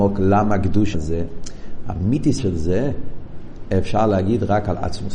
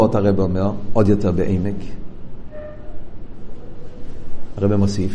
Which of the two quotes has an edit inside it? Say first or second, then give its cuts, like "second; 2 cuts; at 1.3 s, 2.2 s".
first; 2 cuts; at 0.9 s, 2.4 s